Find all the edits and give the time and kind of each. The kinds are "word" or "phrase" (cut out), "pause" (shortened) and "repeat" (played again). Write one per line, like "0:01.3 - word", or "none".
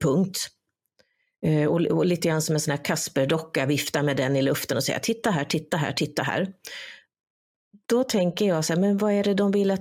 none

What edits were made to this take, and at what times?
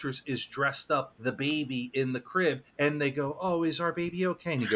0:01.1 - word
0:02.7 - pause

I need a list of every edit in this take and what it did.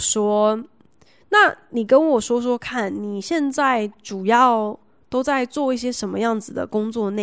none

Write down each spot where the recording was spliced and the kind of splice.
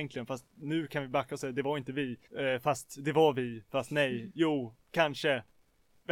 0:02.3 - pause

